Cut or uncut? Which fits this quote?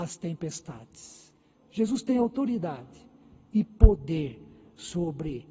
uncut